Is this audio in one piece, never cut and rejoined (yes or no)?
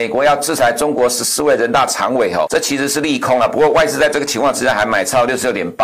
no